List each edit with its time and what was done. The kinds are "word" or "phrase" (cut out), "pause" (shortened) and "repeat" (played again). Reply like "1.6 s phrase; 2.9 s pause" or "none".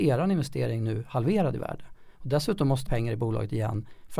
2.9 s phrase